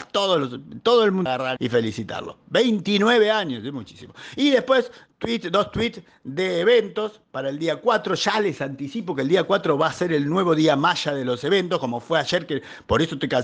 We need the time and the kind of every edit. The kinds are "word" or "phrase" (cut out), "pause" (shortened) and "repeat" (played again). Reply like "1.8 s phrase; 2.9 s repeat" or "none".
1.3 s word; 1.6 s word